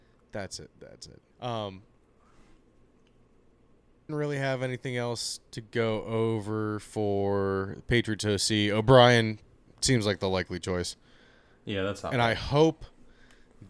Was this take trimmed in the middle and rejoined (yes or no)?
yes